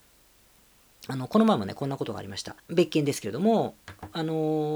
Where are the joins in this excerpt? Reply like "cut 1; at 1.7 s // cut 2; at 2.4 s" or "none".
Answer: cut 1; at 2.6 s